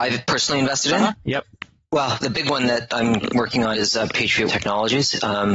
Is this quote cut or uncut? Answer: cut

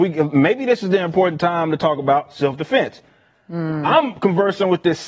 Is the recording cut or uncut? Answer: uncut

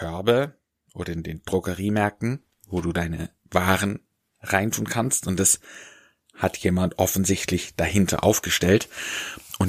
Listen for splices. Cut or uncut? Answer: uncut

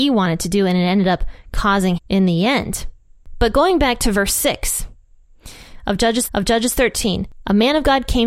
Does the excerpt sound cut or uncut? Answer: cut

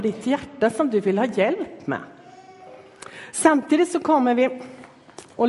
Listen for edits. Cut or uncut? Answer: uncut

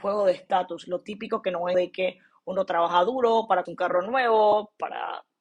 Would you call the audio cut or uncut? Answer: cut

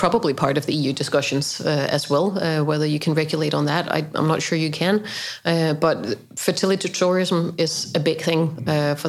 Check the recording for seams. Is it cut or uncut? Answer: uncut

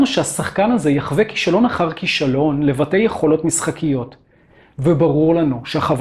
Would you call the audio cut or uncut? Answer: uncut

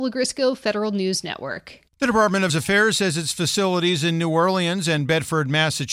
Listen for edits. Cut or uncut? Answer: cut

